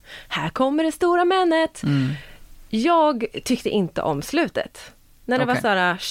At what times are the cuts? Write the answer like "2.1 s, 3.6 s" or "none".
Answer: none